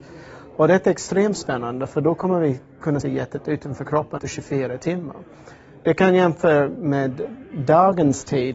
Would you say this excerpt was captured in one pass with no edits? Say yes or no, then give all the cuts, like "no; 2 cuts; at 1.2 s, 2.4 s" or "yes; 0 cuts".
no; 2 cuts; at 3.0 s, 4.2 s